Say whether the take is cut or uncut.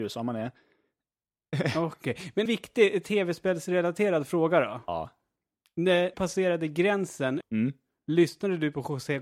cut